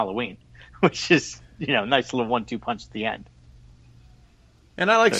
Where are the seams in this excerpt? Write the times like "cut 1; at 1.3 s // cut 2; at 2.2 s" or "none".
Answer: none